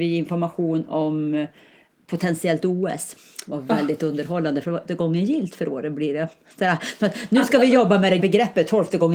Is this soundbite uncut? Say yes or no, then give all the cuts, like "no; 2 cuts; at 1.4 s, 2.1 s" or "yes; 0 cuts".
no; 2 cuts; at 4.9 s, 8.2 s